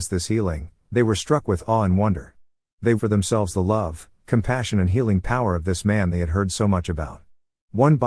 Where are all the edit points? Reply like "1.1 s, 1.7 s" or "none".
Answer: 3.0 s

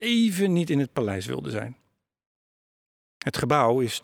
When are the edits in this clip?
none

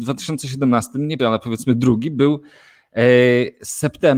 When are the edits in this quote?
1.2 s

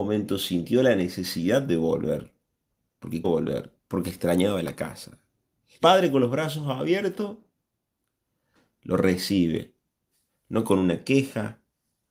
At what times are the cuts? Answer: 3.2 s, 3.8 s, 5.8 s

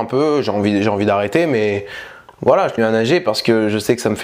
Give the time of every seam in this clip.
2.8 s

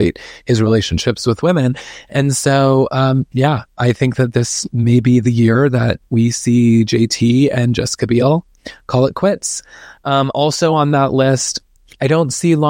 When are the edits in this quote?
none

